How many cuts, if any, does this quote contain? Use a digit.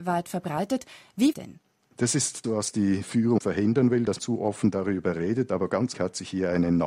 5